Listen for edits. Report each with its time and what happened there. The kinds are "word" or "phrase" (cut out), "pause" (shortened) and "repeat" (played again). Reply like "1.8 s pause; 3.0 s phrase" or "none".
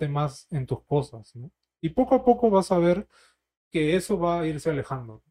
none